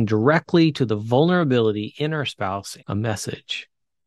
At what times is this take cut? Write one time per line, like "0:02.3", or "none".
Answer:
0:02.8

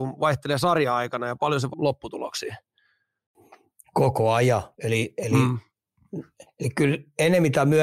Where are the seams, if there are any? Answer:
0:01.7
0:04.7
0:06.5

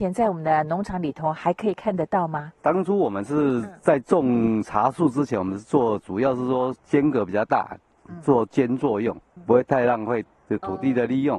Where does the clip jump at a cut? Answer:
0:02.6
0:06.8

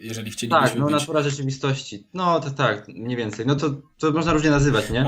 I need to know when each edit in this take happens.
none

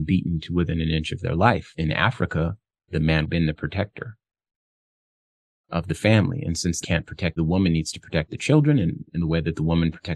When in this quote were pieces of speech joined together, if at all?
0:01.7
0:03.2
0:06.8
0:07.4

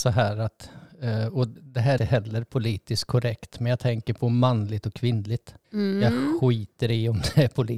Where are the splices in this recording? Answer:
0:01.6
0:02.0
0:05.6

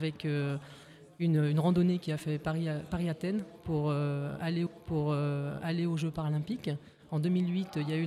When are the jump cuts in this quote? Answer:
0:04.7

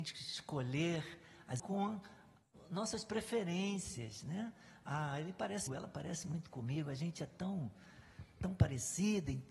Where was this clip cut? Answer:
0:01.6
0:05.7

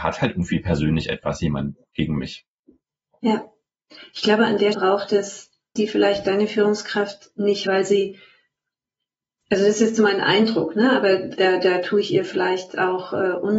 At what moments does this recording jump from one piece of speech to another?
0:04.7
0:05.8
0:07.7
0:11.4

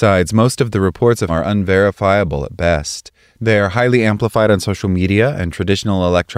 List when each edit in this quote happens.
0:01.3

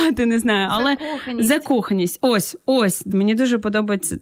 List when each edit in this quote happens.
0:03.1

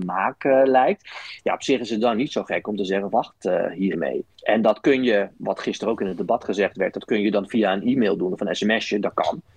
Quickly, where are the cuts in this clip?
0:03.1
0:03.9
0:04.3

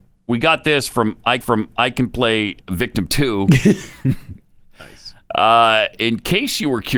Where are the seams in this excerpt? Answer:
0:01.4

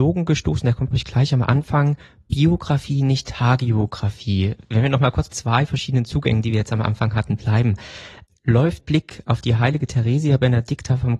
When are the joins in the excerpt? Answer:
0:00.9
0:05.3
0:08.8

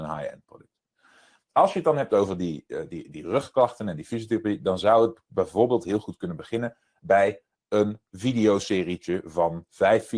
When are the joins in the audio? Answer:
none

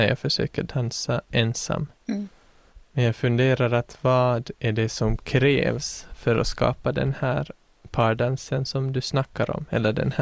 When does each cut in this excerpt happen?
none

